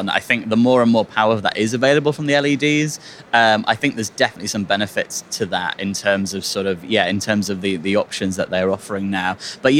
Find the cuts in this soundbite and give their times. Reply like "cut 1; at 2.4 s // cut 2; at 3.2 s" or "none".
none